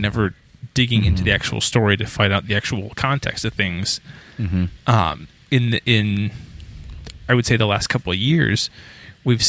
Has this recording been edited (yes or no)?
no